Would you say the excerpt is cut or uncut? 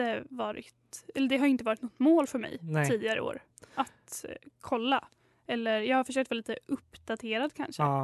uncut